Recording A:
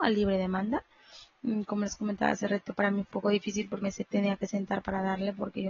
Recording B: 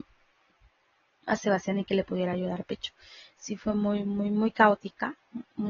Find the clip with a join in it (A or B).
A